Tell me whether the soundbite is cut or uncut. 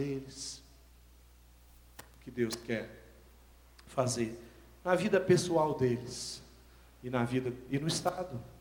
uncut